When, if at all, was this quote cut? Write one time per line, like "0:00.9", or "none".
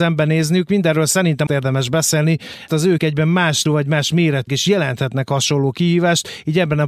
0:01.5
0:02.7
0:03.0
0:03.7
0:04.5